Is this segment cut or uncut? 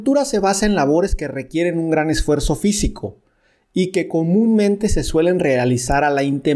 uncut